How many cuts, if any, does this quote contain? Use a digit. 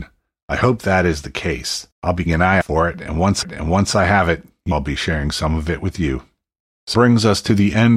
6